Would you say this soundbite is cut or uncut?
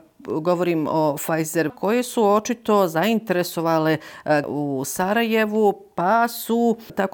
cut